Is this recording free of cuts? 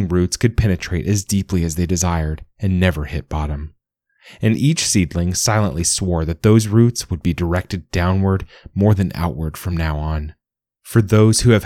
yes; 0 cuts

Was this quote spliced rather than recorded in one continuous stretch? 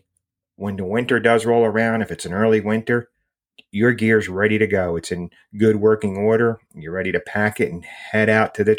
no; 0 cuts

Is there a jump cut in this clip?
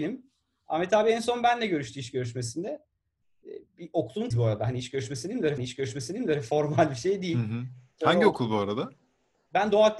yes; 3 cuts; at 3.7 s, 4.3 s, 5.6 s

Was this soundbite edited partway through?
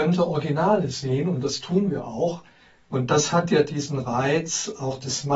no; 0 cuts

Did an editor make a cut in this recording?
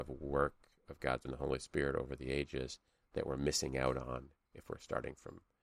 yes; 1 cut; at 1.2 s

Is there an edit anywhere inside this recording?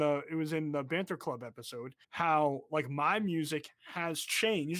yes; 1 cut; at 2.0 s

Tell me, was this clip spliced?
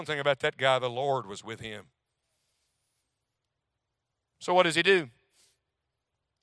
no; 0 cuts

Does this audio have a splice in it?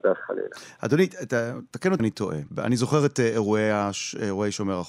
yes; 2 cuts; at 2.0 s, 2.5 s

